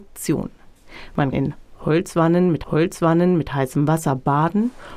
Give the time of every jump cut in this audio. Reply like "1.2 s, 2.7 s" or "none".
1.3 s, 2.6 s